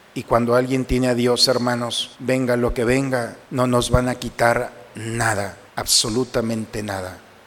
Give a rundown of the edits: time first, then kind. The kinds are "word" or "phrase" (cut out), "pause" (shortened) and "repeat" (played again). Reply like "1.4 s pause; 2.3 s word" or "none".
2.1 s pause; 3.4 s pause; 5.7 s pause

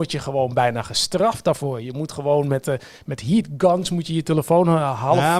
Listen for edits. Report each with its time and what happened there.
none

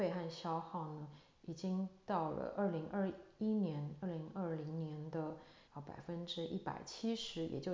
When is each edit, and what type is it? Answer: 5.6 s pause

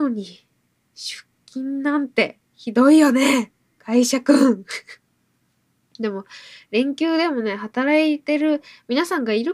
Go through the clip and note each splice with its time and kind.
2.5 s pause

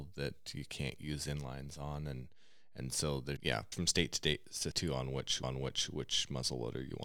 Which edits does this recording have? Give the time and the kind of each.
3.4 s word; 3.7 s phrase; 4.7 s word; 5.4 s repeat

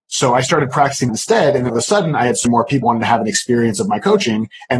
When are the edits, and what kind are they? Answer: 1.1 s word; 1.7 s word; 2.4 s word; 2.8 s word

